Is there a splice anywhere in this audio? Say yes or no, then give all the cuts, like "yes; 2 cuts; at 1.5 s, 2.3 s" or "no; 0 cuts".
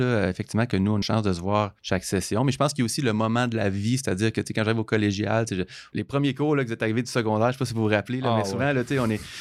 yes; 3 cuts; at 1.0 s, 1.8 s, 5.9 s